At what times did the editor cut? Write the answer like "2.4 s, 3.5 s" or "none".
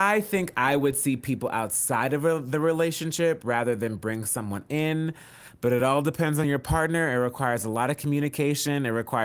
none